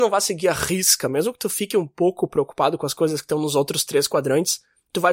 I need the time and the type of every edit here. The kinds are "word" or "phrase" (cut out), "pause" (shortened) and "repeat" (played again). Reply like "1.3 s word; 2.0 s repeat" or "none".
none